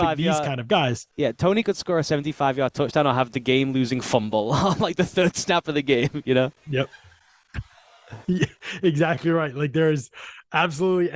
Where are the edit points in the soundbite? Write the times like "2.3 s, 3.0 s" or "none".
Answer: 1.1 s, 8.2 s

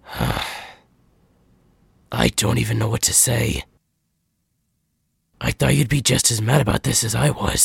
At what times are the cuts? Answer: none

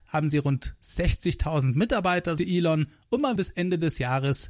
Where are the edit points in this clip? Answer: 2.4 s, 3.4 s

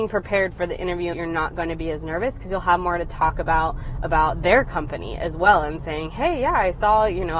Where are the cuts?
1.1 s

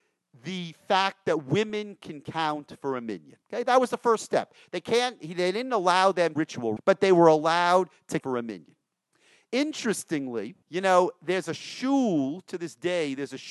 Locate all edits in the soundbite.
3.4 s, 6.4 s, 6.8 s, 8.2 s, 10.6 s

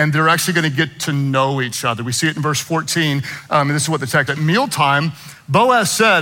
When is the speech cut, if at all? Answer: 4.3 s

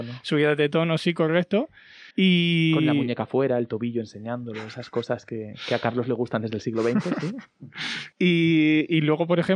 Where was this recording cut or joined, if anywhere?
2.1 s, 8.1 s

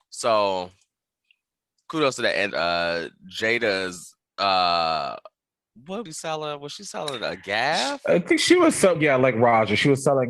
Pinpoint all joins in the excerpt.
2.5 s, 4.2 s, 6.1 s, 9.0 s

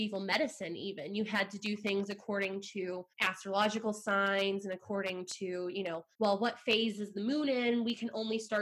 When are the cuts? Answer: 3.1 s, 6.1 s

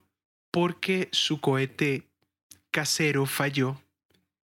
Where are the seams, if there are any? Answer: none

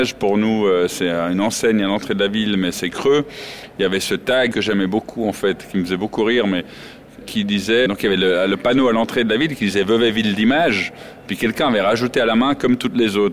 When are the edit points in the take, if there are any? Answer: 7.2 s, 7.9 s

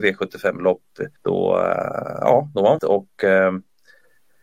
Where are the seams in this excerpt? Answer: 1.2 s, 2.8 s

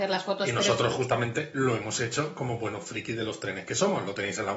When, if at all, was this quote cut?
none

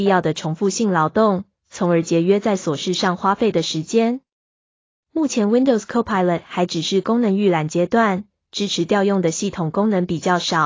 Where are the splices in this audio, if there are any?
none

